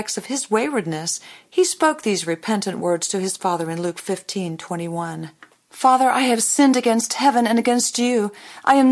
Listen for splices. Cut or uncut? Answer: cut